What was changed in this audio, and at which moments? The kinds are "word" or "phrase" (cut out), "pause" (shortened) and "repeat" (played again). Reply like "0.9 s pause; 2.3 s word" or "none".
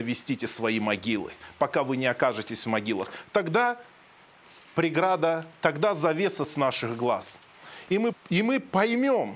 6.4 s word; 8.1 s word